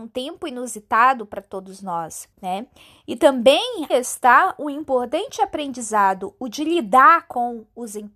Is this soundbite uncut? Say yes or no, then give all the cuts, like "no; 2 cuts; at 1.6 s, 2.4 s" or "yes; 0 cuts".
no; 2 cuts; at 2.3 s, 3.9 s